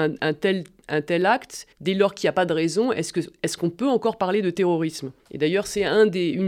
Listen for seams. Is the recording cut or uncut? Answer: cut